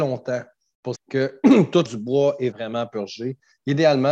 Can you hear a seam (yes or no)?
yes